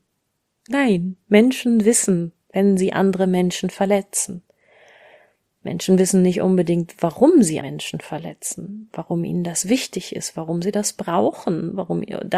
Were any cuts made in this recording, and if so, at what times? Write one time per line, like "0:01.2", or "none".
0:07.6